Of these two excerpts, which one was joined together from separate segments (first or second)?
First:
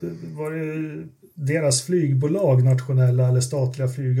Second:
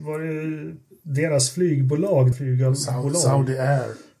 second